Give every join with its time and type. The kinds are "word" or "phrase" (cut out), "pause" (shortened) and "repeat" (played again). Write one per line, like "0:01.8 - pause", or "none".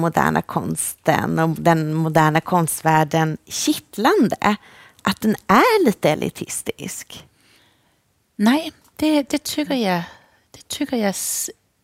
none

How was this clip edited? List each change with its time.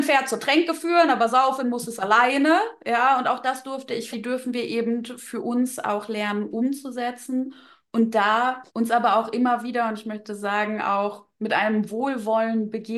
0:04.1 - phrase
0:08.7 - pause

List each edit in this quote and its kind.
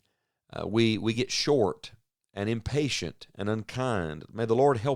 none

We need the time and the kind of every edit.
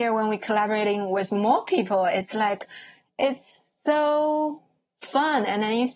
none

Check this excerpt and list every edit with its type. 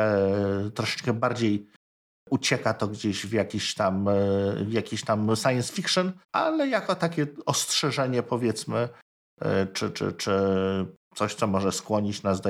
0:06.2 - pause

